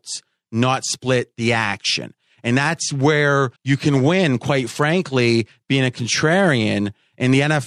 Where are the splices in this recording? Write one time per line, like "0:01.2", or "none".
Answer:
0:03.6